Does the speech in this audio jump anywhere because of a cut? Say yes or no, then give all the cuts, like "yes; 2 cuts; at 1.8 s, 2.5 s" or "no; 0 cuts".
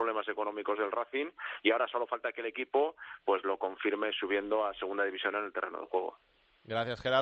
no; 0 cuts